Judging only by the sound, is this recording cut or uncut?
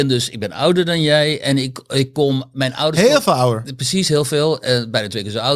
uncut